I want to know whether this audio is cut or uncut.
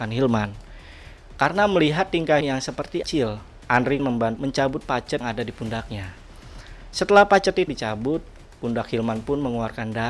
cut